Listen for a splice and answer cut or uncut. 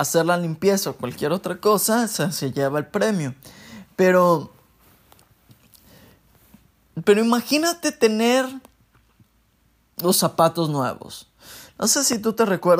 uncut